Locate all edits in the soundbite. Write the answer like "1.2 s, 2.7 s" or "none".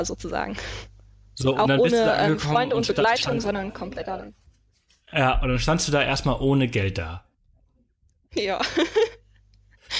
none

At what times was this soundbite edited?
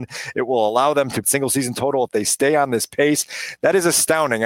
1.2 s

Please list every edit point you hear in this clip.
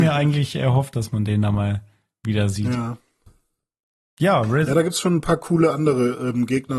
none

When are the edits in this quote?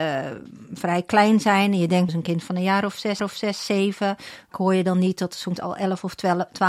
2.1 s, 3.2 s, 4.5 s, 5.6 s

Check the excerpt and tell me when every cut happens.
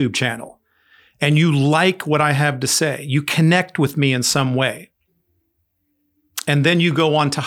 none

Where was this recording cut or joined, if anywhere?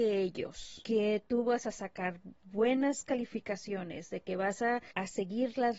none

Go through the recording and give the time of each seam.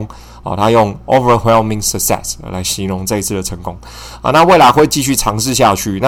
none

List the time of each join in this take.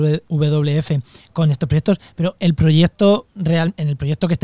none

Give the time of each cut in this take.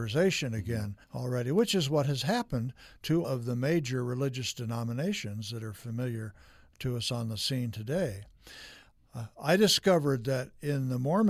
1.0 s, 3.2 s

